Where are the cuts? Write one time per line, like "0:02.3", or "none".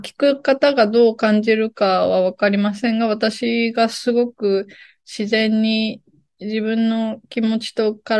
none

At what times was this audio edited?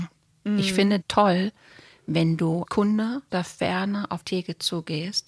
0:01.0
0:02.6
0:03.3
0:04.2

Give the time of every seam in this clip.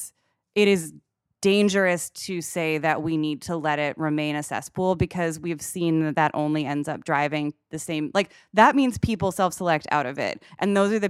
none

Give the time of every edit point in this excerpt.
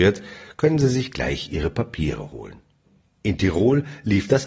none

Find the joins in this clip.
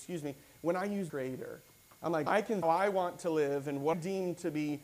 0:01.1
0:01.9
0:02.3
0:02.6
0:03.9

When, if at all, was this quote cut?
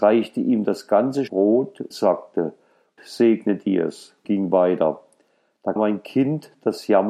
0:01.3
0:01.9
0:03.0
0:04.2
0:05.8

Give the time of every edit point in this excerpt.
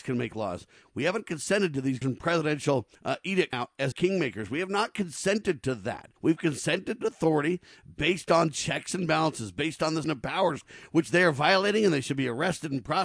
0:02.0
0:02.9
0:03.5
0:03.9
0:06.2
0:07.0
0:10.0

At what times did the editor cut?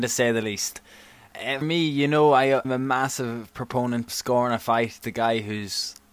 0:01.6
0:02.6
0:04.1
0:05.0

